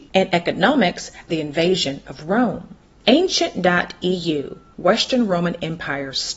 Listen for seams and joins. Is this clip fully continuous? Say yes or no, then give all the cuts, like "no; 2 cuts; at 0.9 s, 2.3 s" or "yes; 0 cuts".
no; 1 cut; at 1.3 s